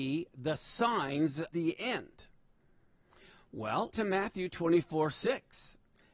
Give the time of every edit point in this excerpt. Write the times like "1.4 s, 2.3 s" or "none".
1.5 s, 3.9 s

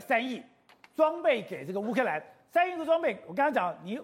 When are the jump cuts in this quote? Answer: none

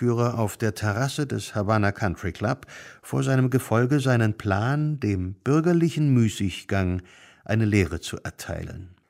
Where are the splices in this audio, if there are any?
none

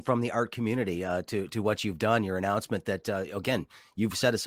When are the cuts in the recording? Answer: none

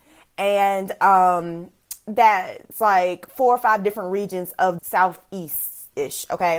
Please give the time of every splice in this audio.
4.8 s

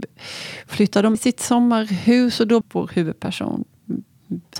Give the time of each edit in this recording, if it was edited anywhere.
1.1 s, 2.6 s

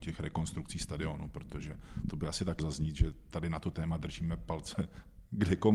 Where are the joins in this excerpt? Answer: 2.6 s

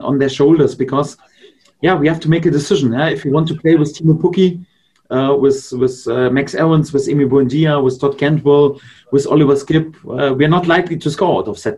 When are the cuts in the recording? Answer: none

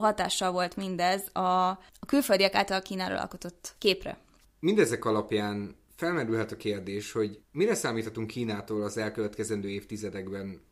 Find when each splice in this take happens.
4.4 s, 7.4 s

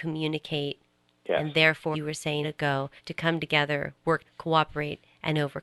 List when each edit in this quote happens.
1.9 s, 2.4 s, 3.0 s, 4.3 s

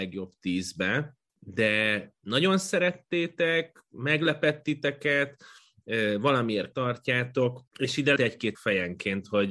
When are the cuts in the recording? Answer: 1.3 s, 6.7 s, 7.7 s, 8.2 s, 8.5 s

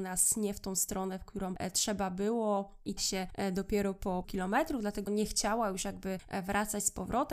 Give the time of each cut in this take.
3.0 s, 4.2 s, 5.1 s

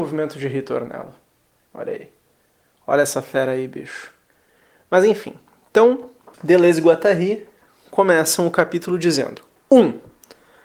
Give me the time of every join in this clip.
6.3 s

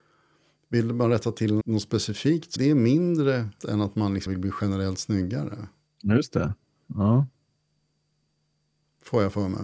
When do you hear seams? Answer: 1.6 s, 2.6 s, 3.6 s, 4.3 s

